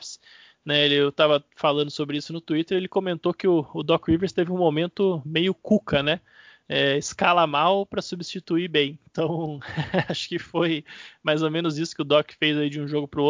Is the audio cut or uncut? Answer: uncut